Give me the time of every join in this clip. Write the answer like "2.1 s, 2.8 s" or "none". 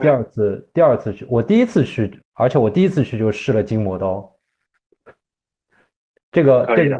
2.2 s